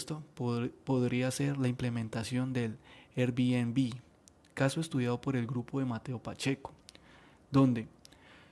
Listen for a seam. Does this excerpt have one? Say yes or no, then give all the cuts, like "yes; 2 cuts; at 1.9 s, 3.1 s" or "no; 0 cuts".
no; 0 cuts